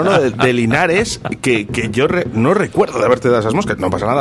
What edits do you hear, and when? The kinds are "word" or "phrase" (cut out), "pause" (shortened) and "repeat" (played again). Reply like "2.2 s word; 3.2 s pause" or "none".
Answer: none